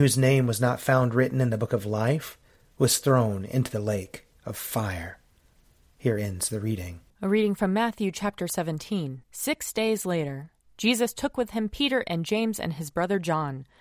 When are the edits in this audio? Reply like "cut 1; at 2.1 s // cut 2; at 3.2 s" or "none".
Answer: cut 1; at 7.1 s // cut 2; at 9.2 s